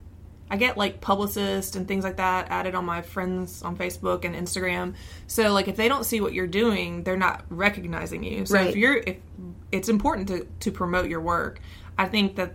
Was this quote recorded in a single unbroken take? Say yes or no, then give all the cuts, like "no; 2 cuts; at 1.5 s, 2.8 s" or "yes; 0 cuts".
yes; 0 cuts